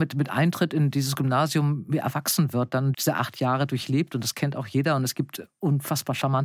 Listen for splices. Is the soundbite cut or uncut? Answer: cut